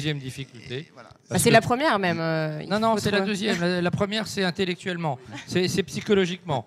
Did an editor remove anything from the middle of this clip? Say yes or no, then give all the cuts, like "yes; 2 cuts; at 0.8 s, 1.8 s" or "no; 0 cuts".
no; 0 cuts